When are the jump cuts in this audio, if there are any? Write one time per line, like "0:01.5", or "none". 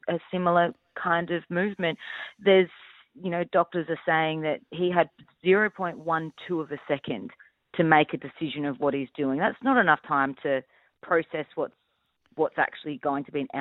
none